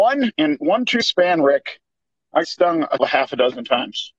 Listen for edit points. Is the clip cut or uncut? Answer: cut